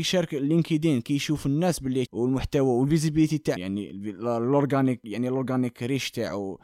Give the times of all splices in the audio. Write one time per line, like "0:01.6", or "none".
0:02.1
0:03.6

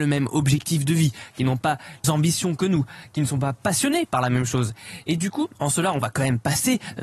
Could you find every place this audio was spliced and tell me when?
0:02.0
0:05.5

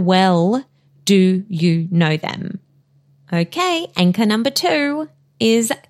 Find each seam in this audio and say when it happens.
none

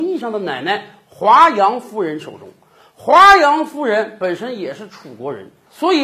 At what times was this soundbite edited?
none

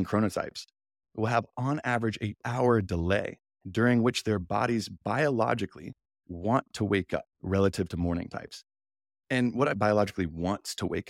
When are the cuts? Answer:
0:02.4
0:07.3
0:09.7

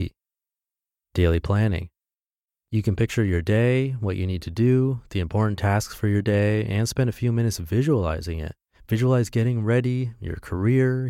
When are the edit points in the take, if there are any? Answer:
none

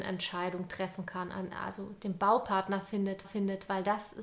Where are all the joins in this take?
0:03.2

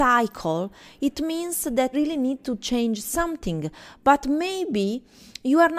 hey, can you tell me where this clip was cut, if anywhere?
0:01.9

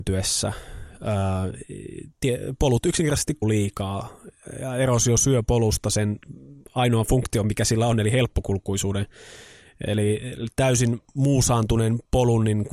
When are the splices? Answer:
0:03.4

